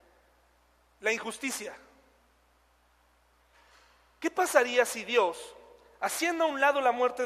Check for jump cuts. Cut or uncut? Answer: uncut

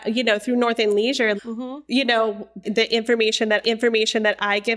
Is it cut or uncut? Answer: cut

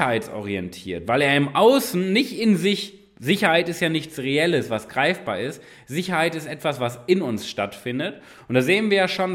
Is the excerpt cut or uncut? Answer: uncut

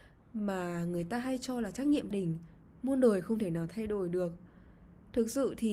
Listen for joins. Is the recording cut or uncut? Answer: cut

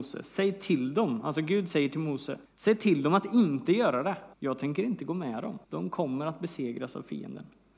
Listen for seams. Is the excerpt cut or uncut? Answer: cut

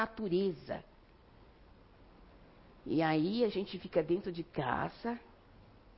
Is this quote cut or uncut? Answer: uncut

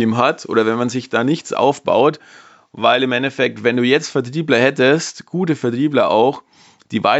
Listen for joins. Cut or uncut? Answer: uncut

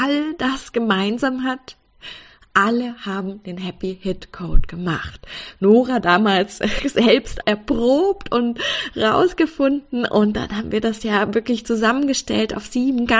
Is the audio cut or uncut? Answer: uncut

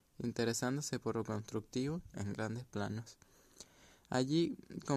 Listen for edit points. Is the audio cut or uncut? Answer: cut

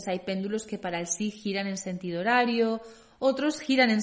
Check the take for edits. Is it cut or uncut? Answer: uncut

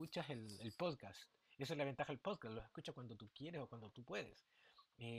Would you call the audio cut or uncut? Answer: uncut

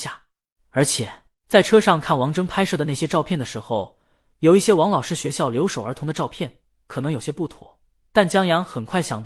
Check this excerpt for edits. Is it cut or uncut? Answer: cut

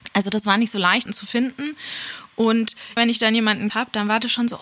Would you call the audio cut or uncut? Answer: cut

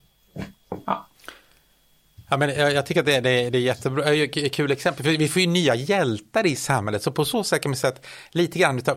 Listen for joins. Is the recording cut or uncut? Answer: uncut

